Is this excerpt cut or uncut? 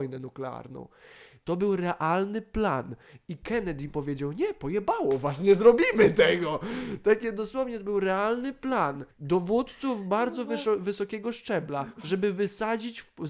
cut